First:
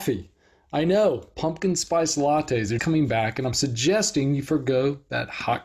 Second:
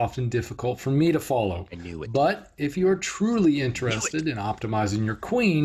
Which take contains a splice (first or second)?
first